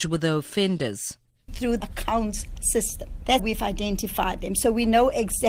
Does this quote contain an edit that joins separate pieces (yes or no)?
yes